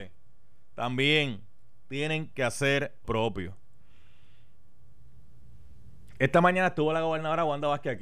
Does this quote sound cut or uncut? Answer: cut